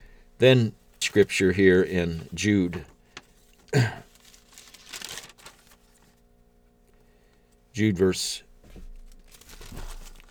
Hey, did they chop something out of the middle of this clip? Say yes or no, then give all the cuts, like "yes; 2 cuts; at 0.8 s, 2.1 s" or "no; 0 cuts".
yes; 1 cut; at 1.0 s